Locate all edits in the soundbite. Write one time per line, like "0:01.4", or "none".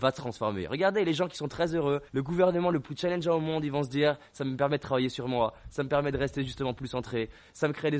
0:02.1